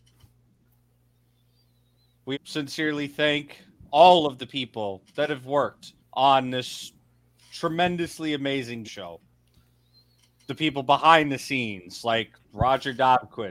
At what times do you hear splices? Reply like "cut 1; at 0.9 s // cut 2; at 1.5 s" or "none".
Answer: cut 1; at 2.3 s // cut 2; at 6.0 s // cut 3; at 8.8 s